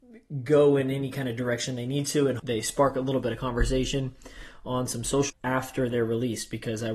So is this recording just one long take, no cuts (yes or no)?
no